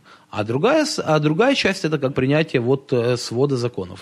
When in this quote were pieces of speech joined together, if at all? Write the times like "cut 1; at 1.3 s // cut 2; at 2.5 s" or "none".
cut 1; at 2.1 s